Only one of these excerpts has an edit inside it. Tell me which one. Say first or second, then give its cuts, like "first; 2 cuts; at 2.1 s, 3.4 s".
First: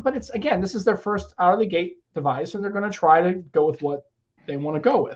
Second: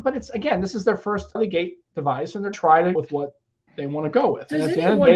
second; 3 cuts; at 1.4 s, 2.5 s, 3.0 s